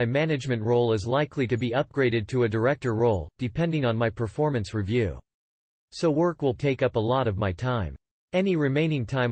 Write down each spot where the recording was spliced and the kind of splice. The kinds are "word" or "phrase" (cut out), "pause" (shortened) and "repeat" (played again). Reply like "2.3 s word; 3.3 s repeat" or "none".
6.6 s word

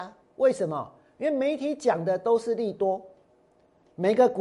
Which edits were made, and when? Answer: none

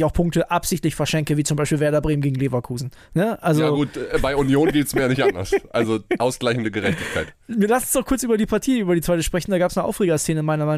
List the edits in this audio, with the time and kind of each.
none

